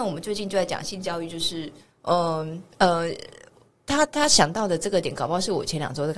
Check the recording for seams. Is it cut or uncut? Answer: cut